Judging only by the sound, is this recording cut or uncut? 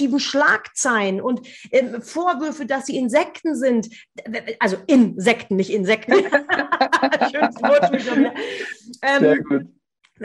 cut